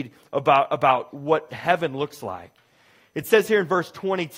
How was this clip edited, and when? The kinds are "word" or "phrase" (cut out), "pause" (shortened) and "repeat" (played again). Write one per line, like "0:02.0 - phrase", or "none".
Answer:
none